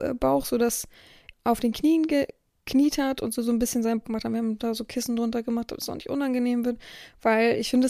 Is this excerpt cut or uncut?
cut